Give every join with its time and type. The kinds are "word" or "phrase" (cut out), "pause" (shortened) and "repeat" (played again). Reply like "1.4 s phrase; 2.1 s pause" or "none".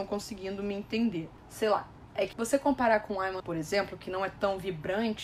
2.3 s word; 3.4 s word

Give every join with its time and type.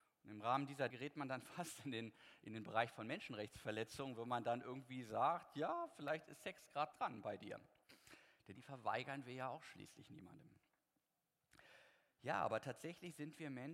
0.9 s word; 6.9 s word; 8.6 s phrase

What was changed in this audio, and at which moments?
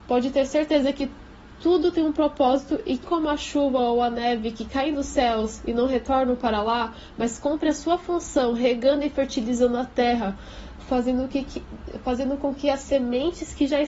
3.0 s word

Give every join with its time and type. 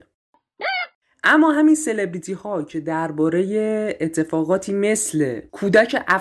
none

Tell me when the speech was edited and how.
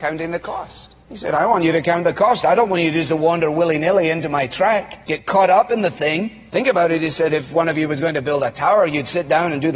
none

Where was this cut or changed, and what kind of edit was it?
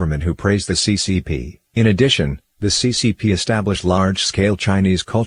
1.7 s pause

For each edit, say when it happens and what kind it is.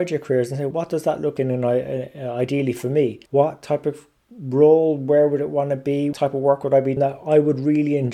1.4 s word; 3.3 s pause; 4.2 s pause; 6.1 s word; 7.0 s word

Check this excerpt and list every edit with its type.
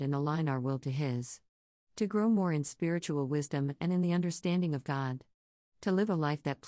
none

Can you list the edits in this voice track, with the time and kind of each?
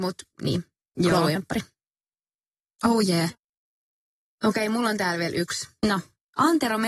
1.4 s word

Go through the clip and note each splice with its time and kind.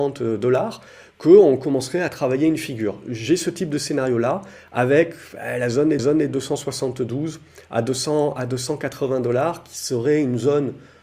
6.0 s repeat

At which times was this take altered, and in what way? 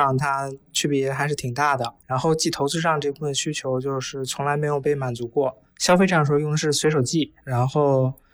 7.4 s pause

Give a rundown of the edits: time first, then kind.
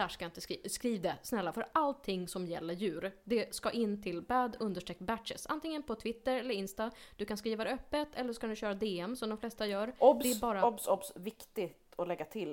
none

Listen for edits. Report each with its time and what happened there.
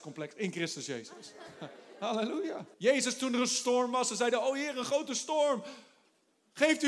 2.7 s pause

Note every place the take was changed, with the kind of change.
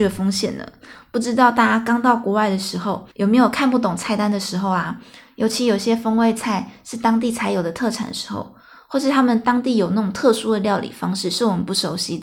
3.1 s pause

